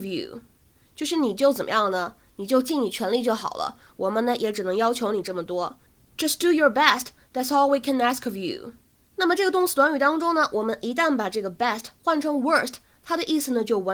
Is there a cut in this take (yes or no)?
no